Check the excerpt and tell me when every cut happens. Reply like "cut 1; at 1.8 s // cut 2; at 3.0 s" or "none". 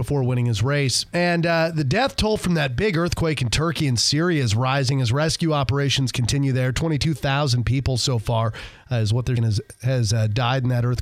cut 1; at 9.4 s